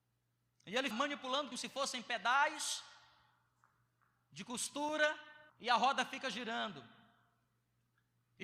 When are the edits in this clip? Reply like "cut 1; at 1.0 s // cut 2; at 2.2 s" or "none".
cut 1; at 0.9 s // cut 2; at 1.5 s // cut 3; at 5.5 s